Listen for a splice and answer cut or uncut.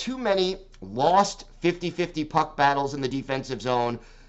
uncut